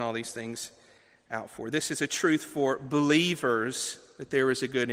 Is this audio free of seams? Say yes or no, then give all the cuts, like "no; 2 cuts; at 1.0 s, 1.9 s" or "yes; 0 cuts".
yes; 0 cuts